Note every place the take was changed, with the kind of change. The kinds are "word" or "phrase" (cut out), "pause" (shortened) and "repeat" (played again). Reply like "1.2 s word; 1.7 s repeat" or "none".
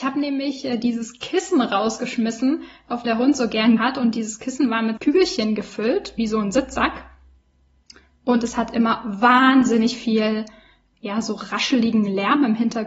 3.0 s word; 3.8 s word; 5.0 s word; 10.9 s word